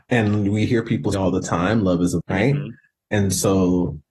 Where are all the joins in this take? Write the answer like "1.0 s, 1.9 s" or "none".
1.1 s, 2.2 s